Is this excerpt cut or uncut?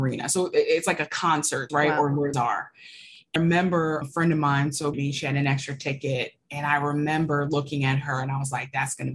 cut